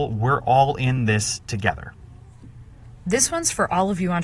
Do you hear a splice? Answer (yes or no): no